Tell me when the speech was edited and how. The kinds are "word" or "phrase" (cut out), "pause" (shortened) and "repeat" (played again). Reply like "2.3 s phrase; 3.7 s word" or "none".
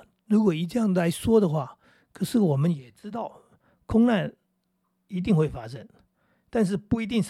none

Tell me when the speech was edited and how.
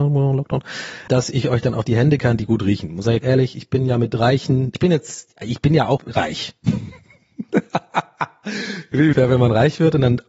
1.1 s word; 2.2 s word; 3.2 s word; 4.7 s word; 6.0 s word; 9.1 s word

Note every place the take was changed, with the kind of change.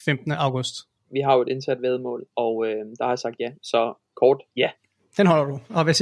1.0 s pause; 4.5 s pause

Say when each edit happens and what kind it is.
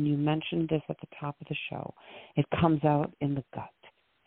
none

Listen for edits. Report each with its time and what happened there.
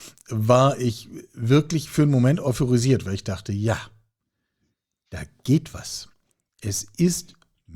none

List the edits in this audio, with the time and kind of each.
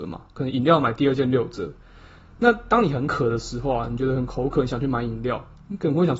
none

